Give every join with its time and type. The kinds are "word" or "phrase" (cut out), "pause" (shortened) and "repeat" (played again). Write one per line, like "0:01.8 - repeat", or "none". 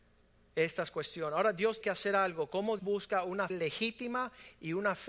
0:01.8 - word
0:02.8 - word
0:03.5 - word